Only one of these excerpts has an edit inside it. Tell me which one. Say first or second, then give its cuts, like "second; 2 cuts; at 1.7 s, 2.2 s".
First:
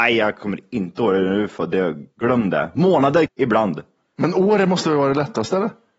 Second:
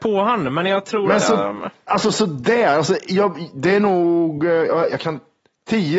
first; 1 cut; at 3.3 s